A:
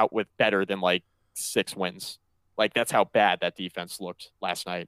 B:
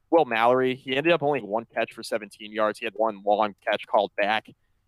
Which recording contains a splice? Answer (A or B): B